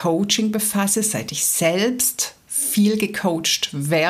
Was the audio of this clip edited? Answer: no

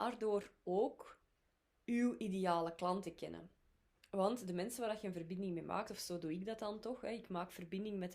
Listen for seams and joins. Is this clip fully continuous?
yes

